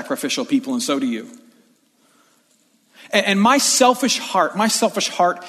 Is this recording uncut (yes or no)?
yes